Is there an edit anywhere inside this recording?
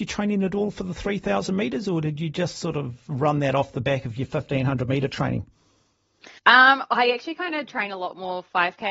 yes; 1 cut; at 6.4 s

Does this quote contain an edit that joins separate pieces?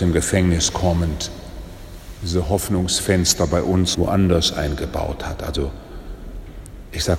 yes; 1 cut; at 3.9 s

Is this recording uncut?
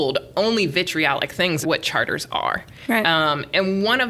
no; 1 cut; at 1.6 s

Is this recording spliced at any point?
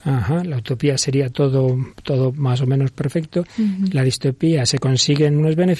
no; 0 cuts

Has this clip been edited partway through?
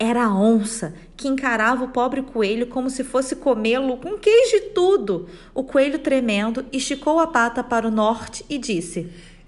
no; 0 cuts

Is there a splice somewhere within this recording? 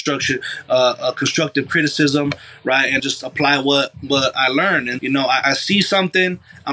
yes; 3 cuts; at 3.0 s, 5.0 s, 5.4 s

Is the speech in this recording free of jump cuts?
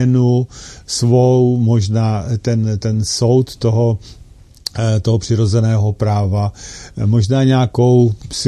yes; 0 cuts

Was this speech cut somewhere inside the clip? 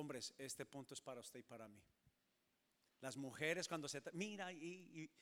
no; 0 cuts

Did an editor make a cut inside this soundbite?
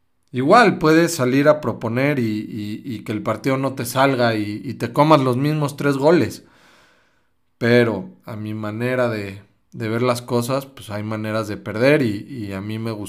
no; 0 cuts

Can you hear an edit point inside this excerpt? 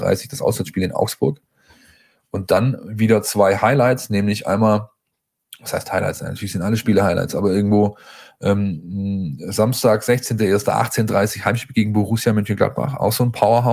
no; 0 cuts

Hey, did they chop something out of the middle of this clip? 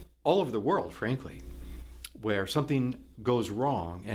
no; 0 cuts

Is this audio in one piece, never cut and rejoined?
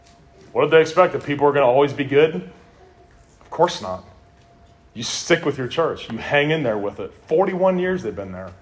yes; 0 cuts

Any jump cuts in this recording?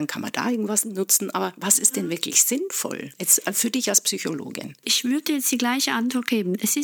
no; 0 cuts

